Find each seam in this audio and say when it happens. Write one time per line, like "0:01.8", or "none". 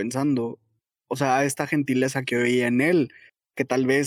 none